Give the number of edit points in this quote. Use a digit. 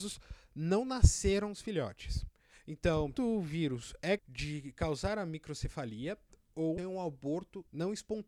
3